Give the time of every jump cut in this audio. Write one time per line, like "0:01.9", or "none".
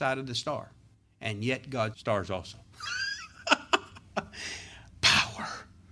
0:00.9
0:01.9

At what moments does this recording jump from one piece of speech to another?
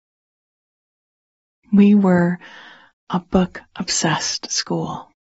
none

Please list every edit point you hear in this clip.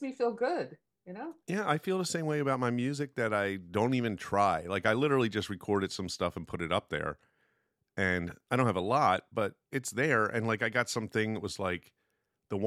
none

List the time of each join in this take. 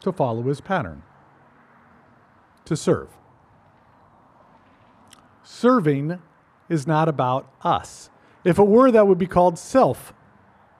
none

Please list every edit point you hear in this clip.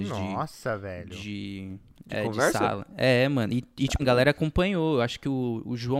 0:04.0

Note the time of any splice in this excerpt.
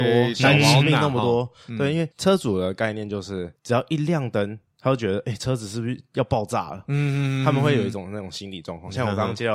0:02.1
0:03.6

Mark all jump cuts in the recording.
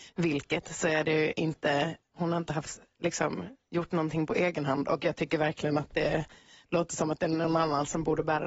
none

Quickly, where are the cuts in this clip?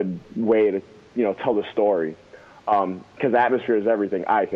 none

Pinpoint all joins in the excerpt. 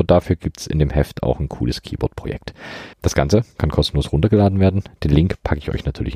0:02.9

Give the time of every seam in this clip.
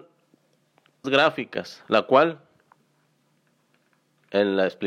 0:01.0

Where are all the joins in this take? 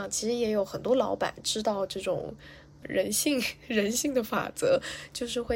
0:02.8

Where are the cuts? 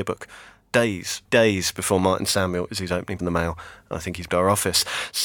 0:01.3
0:02.7
0:03.2
0:04.3

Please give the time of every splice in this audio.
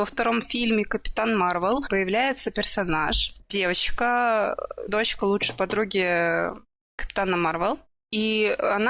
0:04.9

